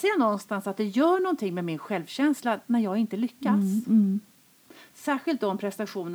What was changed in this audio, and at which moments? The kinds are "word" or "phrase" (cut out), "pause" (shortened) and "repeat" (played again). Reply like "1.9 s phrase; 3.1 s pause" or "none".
none